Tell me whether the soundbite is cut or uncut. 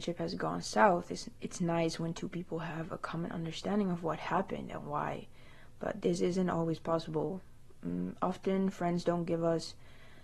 uncut